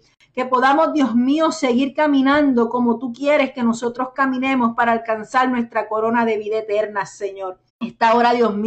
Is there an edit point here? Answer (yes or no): yes